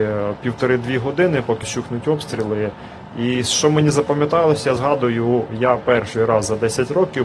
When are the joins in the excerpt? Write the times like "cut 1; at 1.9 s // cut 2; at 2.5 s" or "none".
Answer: cut 1; at 1.6 s // cut 2; at 4.8 s